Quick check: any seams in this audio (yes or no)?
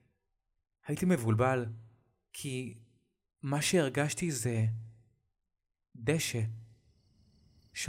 no